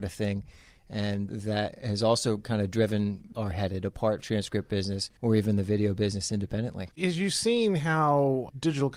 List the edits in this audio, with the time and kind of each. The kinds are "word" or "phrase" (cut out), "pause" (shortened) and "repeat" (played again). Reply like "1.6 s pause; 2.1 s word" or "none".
3.3 s phrase; 4.2 s phrase; 5.2 s pause; 6.9 s pause